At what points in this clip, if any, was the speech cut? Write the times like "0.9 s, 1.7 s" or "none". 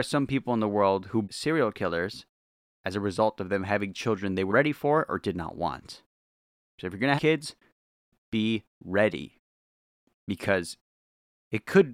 1.2 s, 4.5 s, 7.2 s